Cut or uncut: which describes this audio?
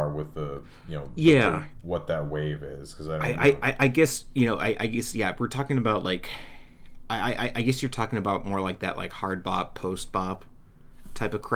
uncut